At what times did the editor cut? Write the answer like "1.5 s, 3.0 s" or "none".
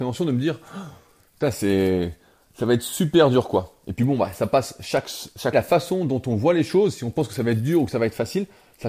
5.5 s